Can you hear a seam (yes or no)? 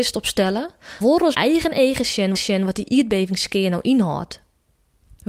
yes